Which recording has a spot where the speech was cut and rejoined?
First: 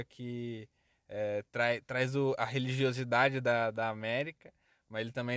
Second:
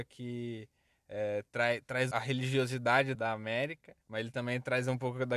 second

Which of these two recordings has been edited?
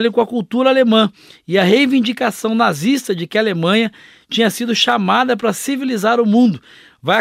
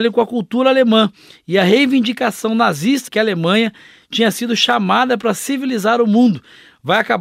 second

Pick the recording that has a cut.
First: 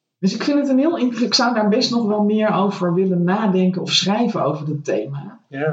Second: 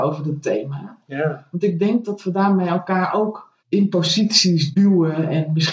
second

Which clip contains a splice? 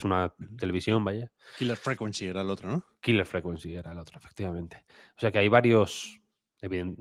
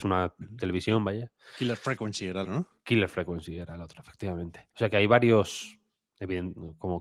second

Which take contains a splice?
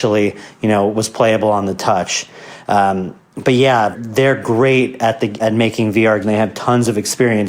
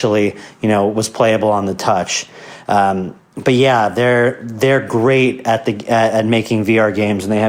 first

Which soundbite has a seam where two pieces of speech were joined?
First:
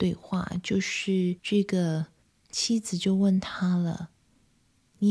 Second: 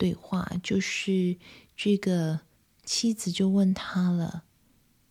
first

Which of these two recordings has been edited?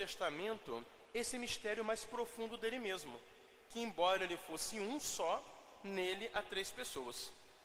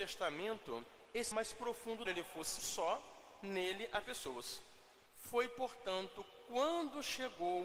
second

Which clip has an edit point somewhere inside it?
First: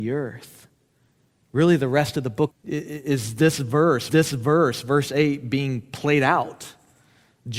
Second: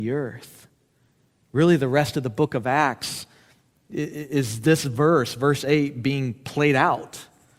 first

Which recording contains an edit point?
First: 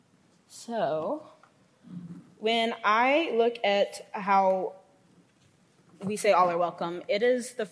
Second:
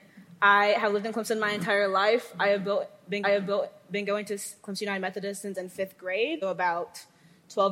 second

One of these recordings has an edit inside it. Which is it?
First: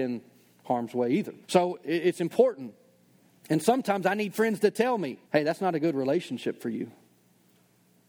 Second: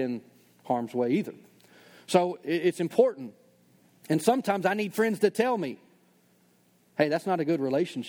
first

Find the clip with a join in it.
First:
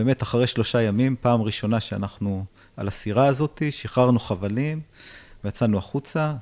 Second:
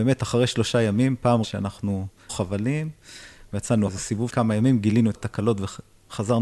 second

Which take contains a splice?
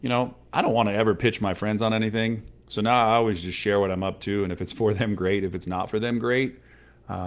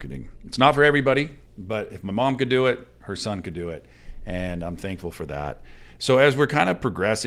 second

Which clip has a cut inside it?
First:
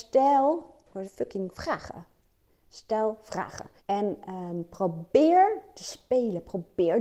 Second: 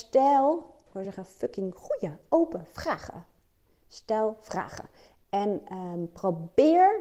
first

